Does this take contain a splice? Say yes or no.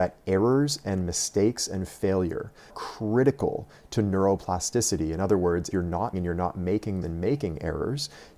yes